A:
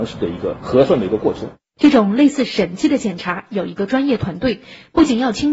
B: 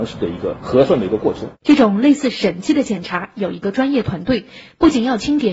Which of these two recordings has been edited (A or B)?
B